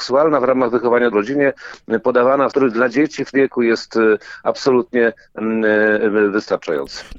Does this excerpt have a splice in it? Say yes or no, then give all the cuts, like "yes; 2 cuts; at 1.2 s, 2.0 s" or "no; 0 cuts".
yes; 3 cuts; at 1.1 s, 2.5 s, 3.3 s